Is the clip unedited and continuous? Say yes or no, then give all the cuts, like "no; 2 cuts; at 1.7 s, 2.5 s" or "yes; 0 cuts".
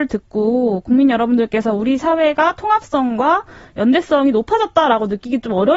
yes; 0 cuts